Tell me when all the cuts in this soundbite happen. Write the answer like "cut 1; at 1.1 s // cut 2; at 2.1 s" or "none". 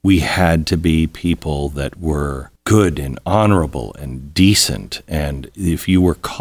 cut 1; at 2.6 s